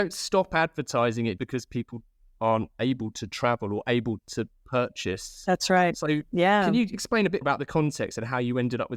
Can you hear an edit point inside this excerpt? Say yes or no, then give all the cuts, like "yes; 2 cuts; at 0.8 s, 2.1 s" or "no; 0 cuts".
yes; 4 cuts; at 1.4 s, 4.2 s, 6.2 s, 7.4 s